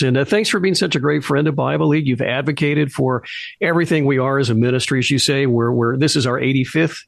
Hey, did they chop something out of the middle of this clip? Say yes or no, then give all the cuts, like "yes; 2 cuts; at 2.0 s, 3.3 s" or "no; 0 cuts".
no; 0 cuts